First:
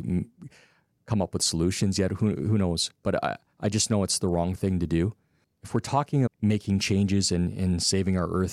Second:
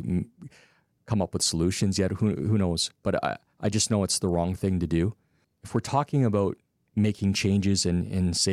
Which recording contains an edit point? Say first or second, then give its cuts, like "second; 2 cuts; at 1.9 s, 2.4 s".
first; 1 cut; at 6.3 s